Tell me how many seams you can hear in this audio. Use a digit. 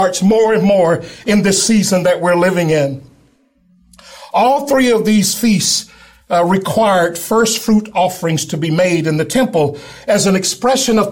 0